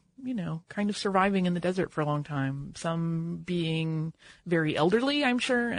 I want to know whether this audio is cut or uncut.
uncut